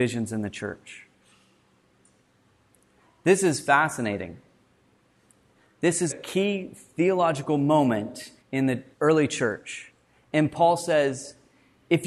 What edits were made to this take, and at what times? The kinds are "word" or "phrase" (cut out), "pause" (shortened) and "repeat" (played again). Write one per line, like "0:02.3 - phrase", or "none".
0:06.1 - word
0:08.4 - pause
0:08.9 - pause

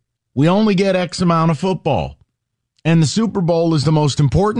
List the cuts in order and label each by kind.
none

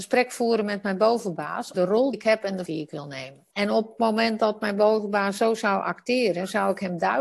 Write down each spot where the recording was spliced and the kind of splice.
0:01.7 - word
0:02.1 - word
0:02.7 - word
0:03.5 - pause

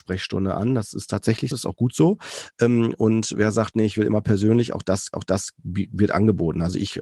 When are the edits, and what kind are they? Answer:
0:01.5 - word
0:05.1 - repeat

